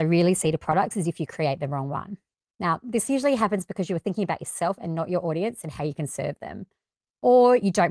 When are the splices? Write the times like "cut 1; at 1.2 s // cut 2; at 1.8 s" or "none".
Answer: none